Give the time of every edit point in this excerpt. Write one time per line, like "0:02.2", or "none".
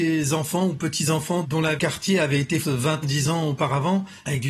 0:01.4
0:01.8
0:02.6
0:03.0